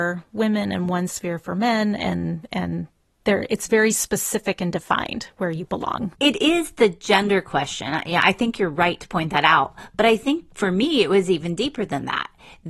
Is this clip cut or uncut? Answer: cut